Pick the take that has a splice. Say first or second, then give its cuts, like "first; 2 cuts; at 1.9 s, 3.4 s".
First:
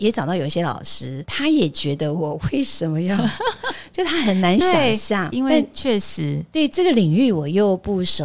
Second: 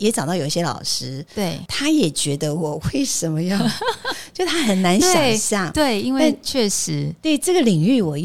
first; 2 cuts; at 1.3 s, 5.3 s